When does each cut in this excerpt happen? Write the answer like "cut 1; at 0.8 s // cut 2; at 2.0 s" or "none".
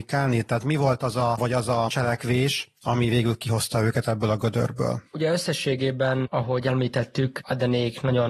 cut 1; at 1.4 s // cut 2; at 5.1 s